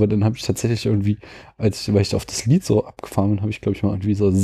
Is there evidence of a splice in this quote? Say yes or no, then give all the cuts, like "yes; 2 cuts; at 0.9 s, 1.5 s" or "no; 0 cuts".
no; 0 cuts